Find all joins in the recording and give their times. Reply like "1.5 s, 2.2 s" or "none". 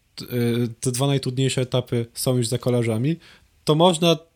none